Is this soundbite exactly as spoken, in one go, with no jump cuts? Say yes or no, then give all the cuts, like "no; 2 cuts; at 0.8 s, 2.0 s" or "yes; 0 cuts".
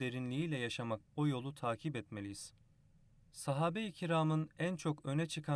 no; 1 cut; at 1.0 s